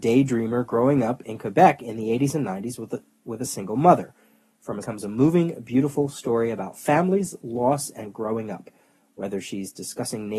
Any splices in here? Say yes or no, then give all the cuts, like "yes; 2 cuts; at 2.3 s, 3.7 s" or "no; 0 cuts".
yes; 1 cut; at 4.8 s